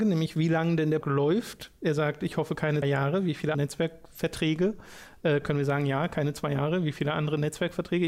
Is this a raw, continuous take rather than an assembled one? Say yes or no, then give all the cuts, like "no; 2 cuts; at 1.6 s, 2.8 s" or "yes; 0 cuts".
no; 3 cuts; at 1.0 s, 2.8 s, 3.5 s